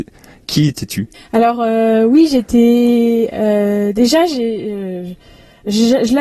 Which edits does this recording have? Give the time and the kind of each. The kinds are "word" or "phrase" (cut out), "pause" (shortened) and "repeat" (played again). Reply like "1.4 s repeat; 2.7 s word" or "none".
1.1 s pause